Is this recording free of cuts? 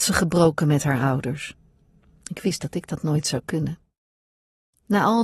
yes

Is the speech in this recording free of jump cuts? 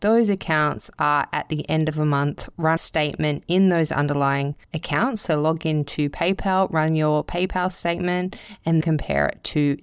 no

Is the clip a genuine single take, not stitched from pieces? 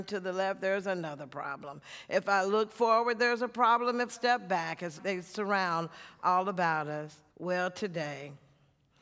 no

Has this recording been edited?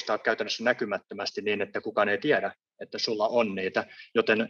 no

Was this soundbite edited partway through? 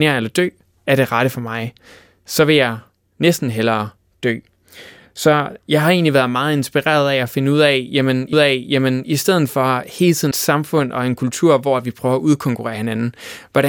yes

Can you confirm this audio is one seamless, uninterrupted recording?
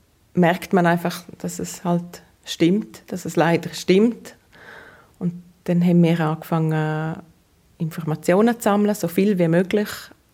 yes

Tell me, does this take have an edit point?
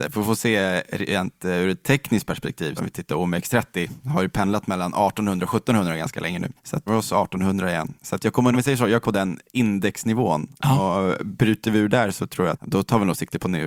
yes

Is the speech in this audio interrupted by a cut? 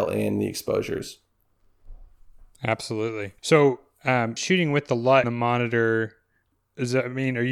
yes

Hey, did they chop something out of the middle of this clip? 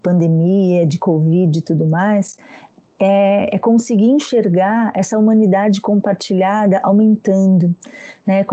no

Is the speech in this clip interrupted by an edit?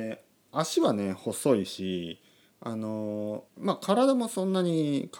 yes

